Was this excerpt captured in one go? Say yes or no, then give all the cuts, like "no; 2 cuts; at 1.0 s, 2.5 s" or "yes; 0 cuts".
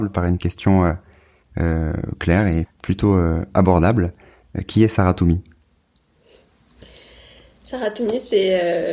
no; 1 cut; at 2.7 s